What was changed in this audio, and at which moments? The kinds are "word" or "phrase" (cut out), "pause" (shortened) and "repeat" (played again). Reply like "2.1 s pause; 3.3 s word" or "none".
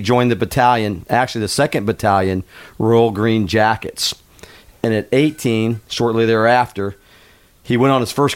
none